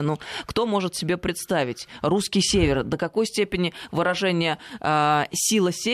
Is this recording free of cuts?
yes; 0 cuts

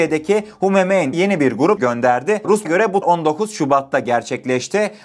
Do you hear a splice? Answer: yes; 4 cuts; at 1.1 s, 1.8 s, 2.6 s, 3.0 s

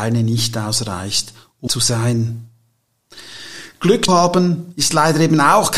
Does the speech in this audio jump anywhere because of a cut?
yes; 2 cuts; at 1.7 s, 4.1 s

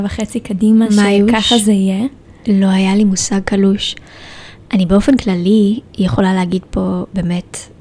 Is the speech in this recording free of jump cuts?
yes; 0 cuts

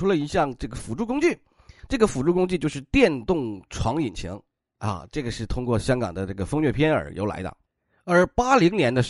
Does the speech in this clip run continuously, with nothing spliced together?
yes; 0 cuts

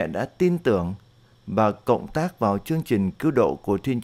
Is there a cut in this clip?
no; 0 cuts

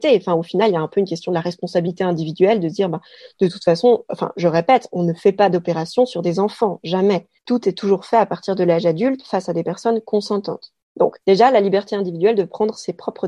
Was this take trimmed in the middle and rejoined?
yes; 2 cuts; at 7.4 s, 11.2 s

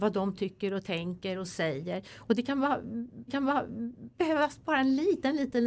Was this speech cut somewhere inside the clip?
yes; 1 cut; at 3.3 s

